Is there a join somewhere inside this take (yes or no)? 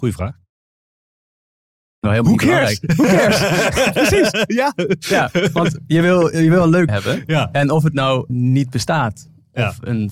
yes